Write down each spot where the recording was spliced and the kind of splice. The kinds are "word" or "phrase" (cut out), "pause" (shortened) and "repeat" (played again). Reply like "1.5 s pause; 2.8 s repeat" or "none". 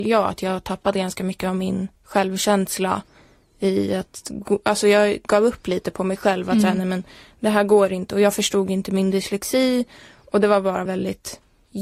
1.9 s pause; 10.9 s word

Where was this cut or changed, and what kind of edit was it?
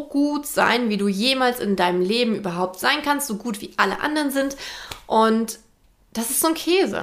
none

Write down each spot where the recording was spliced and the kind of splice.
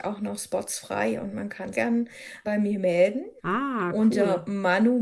1.7 s phrase; 2.4 s word; 3.4 s pause

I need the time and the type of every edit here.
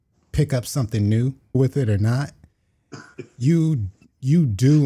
1.5 s phrase

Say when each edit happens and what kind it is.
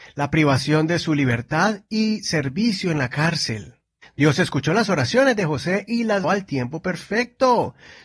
4.0 s pause; 6.2 s word

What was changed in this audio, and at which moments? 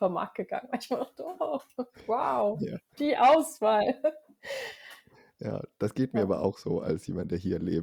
none

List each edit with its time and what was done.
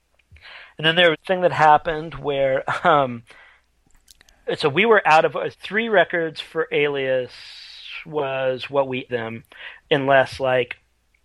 1.1 s phrase; 5.5 s word; 9.1 s word

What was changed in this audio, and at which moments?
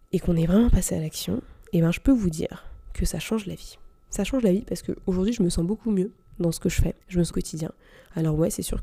7.0 s pause; 7.3 s phrase

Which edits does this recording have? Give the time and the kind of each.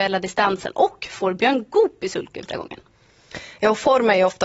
2.5 s word

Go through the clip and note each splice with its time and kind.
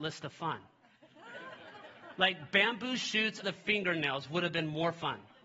3.4 s word

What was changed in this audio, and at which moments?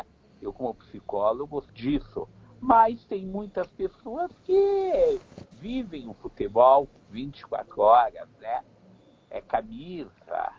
1.7 s phrase; 5.5 s pause

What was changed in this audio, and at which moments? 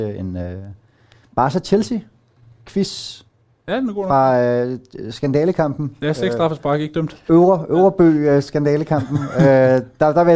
none

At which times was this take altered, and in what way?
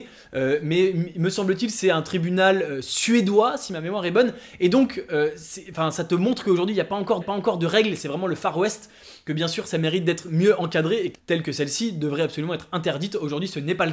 7.2 s repeat; 11.1 s phrase

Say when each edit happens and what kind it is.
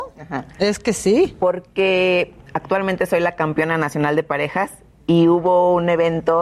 none

